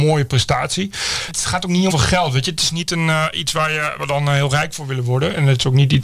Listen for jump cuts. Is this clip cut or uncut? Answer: cut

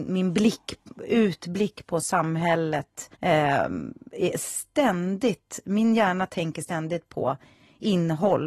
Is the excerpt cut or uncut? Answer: cut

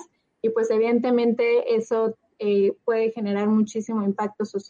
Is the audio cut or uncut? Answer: uncut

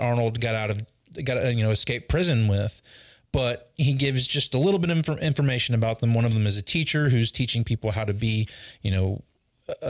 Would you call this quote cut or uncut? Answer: uncut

